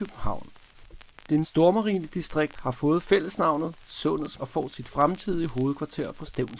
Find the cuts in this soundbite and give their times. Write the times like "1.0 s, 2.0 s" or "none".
1.4 s, 4.4 s